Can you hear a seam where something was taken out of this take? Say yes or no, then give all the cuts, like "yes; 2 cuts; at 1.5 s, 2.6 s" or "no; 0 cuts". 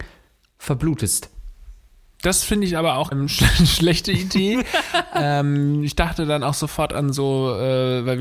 yes; 1 cut; at 3.1 s